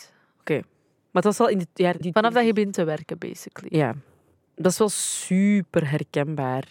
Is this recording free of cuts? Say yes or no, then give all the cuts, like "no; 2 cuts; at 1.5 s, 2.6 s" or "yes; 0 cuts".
no; 1 cut; at 2.0 s